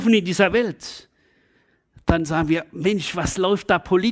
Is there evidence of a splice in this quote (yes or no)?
no